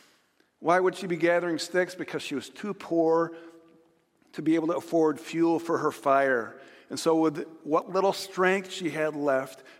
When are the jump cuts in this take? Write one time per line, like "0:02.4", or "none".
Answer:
none